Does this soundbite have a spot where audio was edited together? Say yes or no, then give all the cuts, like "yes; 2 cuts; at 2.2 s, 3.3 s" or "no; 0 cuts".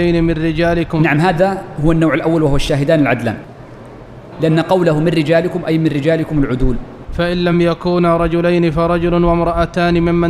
no; 0 cuts